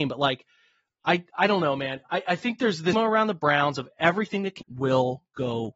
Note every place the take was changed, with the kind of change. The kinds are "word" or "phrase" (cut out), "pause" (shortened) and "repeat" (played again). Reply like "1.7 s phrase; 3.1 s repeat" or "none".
2.9 s word; 4.6 s phrase